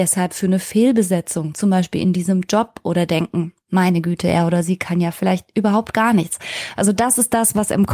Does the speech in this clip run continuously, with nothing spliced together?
yes; 0 cuts

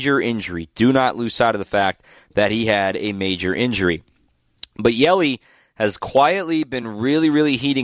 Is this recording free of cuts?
yes; 0 cuts

